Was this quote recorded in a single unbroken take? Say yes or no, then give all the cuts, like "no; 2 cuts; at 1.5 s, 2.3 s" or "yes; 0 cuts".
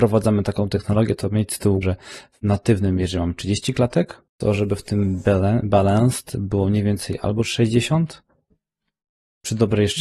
no; 2 cuts; at 1.8 s, 4.3 s